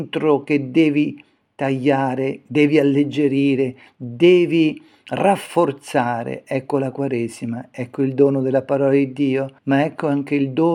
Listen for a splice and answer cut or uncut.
cut